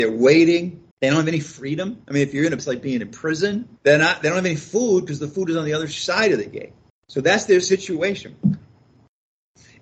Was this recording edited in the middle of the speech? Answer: yes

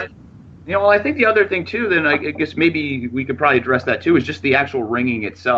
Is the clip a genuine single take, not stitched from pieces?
yes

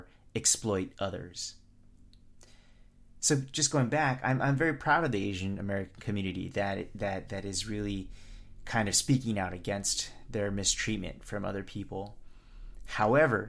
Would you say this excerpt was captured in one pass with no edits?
yes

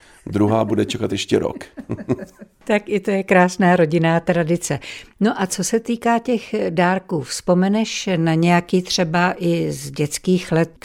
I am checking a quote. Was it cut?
no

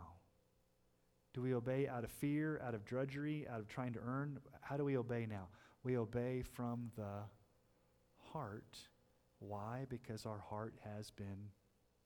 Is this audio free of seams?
yes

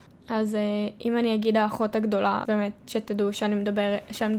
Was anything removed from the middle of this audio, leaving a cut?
yes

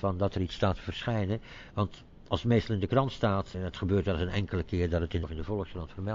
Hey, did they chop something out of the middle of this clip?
yes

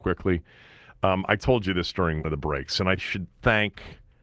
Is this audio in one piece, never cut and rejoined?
no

